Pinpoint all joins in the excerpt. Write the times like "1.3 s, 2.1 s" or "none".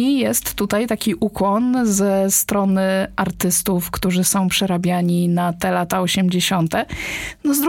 none